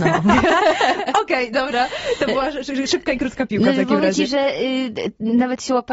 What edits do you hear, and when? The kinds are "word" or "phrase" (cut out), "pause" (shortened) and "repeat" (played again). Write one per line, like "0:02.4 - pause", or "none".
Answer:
none

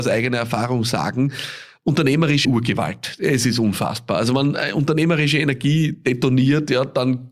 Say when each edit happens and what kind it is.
0:02.4 - phrase

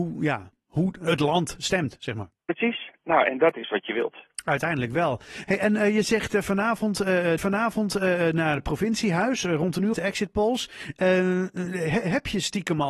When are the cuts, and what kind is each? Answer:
0:02.4 - pause
0:07.4 - repeat
0:09.9 - phrase

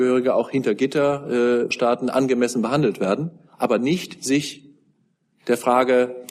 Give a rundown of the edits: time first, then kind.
0:01.7 - word

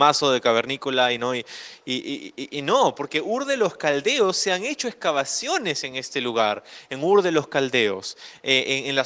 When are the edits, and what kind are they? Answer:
none

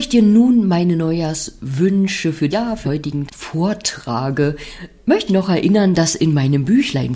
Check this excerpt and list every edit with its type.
0:02.5 - word
0:02.8 - word
0:03.3 - word
0:05.3 - word

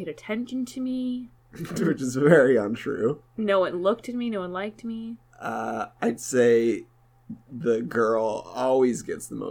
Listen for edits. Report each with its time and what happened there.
0:01.4 - pause
0:07.4 - pause

